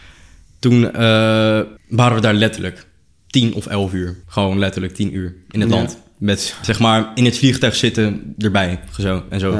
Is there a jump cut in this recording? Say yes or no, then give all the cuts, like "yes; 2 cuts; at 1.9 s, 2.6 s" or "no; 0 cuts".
yes; 2 cuts; at 1.8 s, 4.2 s